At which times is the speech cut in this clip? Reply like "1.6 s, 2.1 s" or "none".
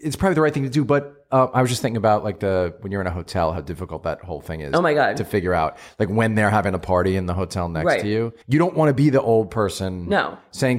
8.4 s